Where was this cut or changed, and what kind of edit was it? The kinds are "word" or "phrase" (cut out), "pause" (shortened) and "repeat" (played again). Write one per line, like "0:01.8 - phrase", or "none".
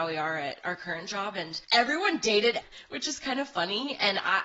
0:01.6 - pause
0:02.6 - word